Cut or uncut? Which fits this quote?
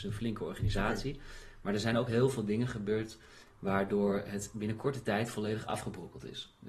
uncut